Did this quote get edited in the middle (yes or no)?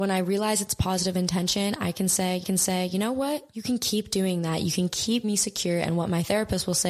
yes